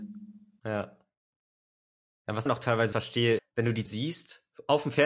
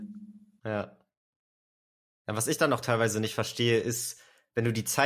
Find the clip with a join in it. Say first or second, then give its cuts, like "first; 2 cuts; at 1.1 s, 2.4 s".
first; 4 cuts; at 2.5 s, 2.9 s, 3.4 s, 3.9 s